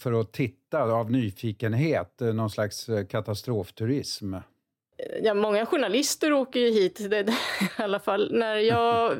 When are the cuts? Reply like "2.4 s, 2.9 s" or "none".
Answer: none